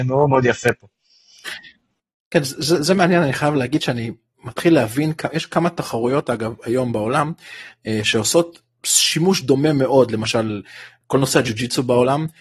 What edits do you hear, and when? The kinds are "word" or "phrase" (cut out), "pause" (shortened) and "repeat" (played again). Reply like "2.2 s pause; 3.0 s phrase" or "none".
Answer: 2.1 s pause

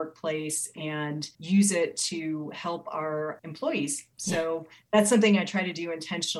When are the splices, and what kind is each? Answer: 1.3 s pause; 4.1 s pause

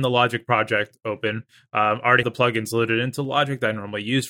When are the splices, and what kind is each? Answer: 2.2 s word

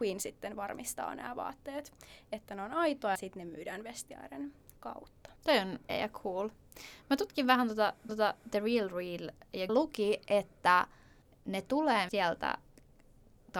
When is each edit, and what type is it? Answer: 3.2 s word; 5.4 s pause; 5.9 s word; 8.1 s repeat; 9.7 s phrase; 11.2 s pause; 12.1 s word

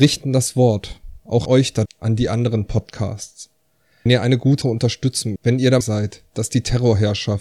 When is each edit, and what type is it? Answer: 1.5 s word; 1.9 s word; 4.1 s word; 4.6 s word; 5.4 s word; 5.8 s word

